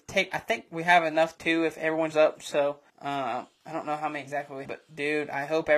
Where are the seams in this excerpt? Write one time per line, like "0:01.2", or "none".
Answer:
0:01.4
0:02.1
0:02.9
0:04.6